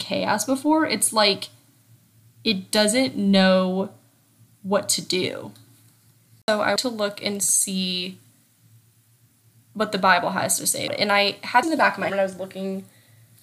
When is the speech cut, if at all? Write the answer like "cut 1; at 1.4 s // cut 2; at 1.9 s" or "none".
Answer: cut 1; at 6.8 s // cut 2; at 10.9 s // cut 3; at 11.6 s // cut 4; at 12.1 s